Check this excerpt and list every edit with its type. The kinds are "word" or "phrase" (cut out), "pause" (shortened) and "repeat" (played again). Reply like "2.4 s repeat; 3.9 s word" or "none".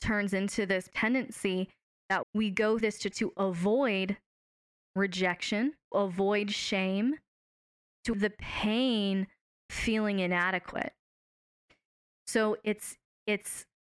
0.9 s word; 2.2 s word; 2.8 s word; 3.1 s word; 5.9 s word; 8.1 s word; 9.7 s word